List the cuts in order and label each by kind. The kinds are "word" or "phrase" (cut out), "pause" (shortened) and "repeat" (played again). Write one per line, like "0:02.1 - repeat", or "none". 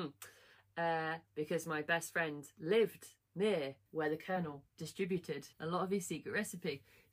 0:01.3 - pause
0:03.9 - pause
0:05.5 - pause